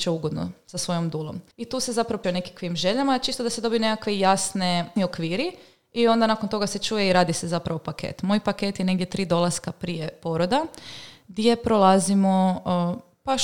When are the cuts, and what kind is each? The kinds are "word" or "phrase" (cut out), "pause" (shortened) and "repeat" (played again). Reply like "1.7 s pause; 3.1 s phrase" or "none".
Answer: 1.5 s pause; 2.2 s word; 5.0 s word